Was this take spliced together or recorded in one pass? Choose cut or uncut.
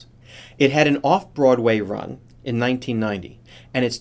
uncut